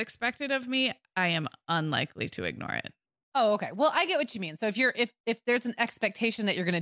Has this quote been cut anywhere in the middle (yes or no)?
no